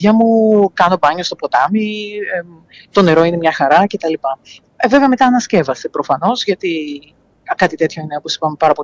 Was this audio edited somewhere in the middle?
no; 0 cuts

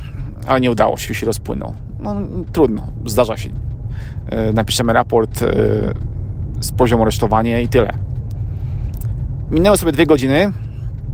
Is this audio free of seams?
no; 1 cut; at 1.1 s

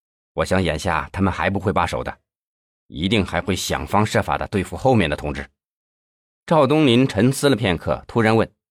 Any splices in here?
no; 0 cuts

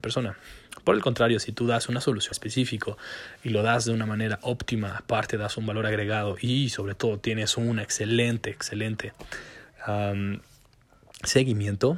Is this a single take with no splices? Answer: no; 1 cut; at 2.3 s

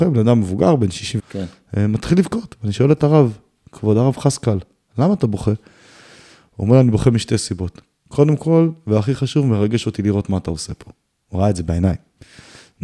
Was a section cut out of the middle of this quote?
yes; 1 cut; at 1.2 s

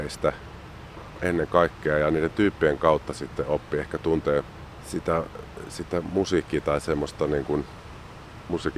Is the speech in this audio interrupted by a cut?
no; 0 cuts

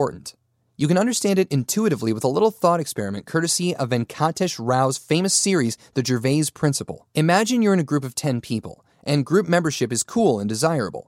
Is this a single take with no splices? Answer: no; 1 cut; at 7.1 s

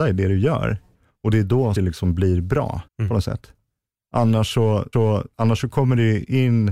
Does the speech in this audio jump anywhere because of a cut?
yes; 3 cuts; at 1.7 s, 2.9 s, 4.9 s

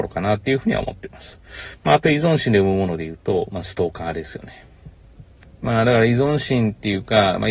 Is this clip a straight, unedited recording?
no; 1 cut; at 5.4 s

